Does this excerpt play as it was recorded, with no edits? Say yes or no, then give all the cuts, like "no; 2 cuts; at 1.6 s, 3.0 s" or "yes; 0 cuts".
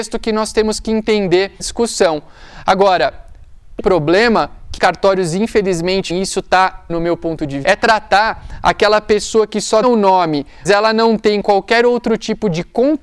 no; 8 cuts; at 1.6 s, 3.8 s, 4.8 s, 6.1 s, 6.9 s, 7.6 s, 9.8 s, 10.7 s